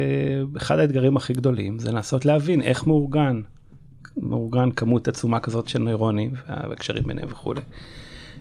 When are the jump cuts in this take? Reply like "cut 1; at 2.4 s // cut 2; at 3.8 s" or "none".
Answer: none